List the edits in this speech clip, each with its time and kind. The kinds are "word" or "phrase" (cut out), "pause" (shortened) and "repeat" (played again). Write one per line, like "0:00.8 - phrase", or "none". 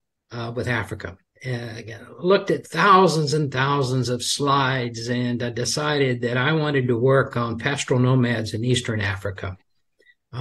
0:01.2 - pause